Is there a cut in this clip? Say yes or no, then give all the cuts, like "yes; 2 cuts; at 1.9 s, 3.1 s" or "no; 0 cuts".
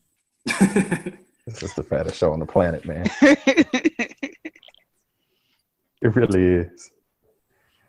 no; 0 cuts